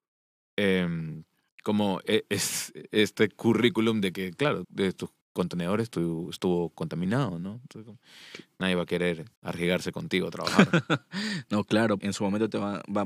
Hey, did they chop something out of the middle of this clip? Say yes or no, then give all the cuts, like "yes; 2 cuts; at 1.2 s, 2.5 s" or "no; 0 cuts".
yes; 5 cuts; at 1.5 s, 4.6 s, 5.2 s, 9.3 s, 12.0 s